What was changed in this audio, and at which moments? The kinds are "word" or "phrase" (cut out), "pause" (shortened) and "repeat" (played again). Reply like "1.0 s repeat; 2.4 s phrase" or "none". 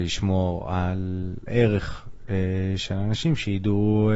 1.5 s word